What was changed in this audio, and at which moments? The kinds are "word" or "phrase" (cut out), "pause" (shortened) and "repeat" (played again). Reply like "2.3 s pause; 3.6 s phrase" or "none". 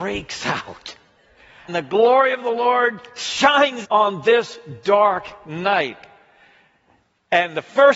1.7 s word; 3.8 s word